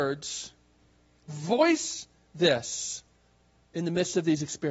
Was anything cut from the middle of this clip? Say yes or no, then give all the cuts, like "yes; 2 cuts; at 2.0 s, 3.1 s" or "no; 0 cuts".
yes; 1 cut; at 1.3 s